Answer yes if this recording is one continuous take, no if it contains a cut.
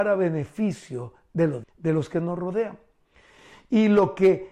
no